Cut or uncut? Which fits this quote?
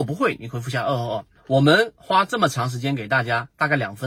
cut